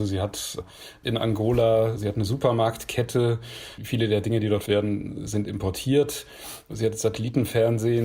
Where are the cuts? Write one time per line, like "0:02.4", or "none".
0:01.0
0:03.8
0:04.7